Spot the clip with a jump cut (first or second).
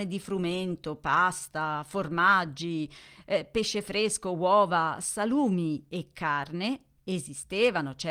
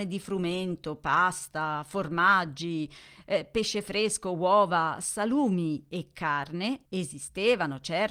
second